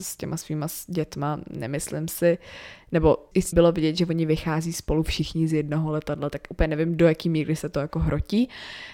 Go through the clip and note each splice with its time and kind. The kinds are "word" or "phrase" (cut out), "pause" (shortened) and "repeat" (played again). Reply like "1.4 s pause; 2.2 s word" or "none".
3.5 s phrase